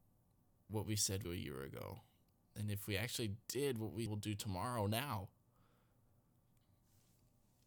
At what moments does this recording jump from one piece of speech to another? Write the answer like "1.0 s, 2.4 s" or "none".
1.2 s, 2.2 s, 3.4 s, 4.1 s